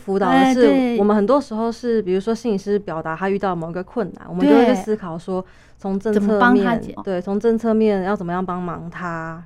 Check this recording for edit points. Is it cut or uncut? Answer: cut